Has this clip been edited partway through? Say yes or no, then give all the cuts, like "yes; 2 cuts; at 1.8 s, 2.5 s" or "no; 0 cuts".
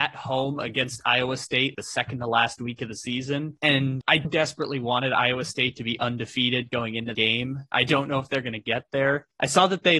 yes; 3 cuts; at 1.7 s, 4.2 s, 7.1 s